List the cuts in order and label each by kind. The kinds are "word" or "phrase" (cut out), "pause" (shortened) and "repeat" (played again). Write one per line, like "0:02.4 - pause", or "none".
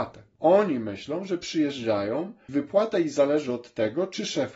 0:02.5 - word